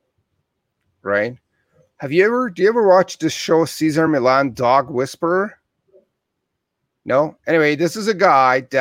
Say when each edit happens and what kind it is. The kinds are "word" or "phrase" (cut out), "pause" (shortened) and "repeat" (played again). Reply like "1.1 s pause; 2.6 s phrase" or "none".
none